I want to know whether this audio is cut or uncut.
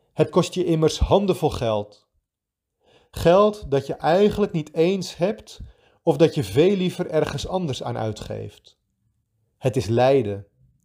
uncut